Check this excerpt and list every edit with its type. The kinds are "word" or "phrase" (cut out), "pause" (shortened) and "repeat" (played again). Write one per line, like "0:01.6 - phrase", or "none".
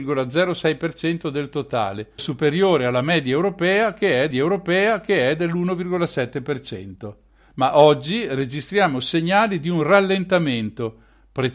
0:02.2 - word
0:04.3 - repeat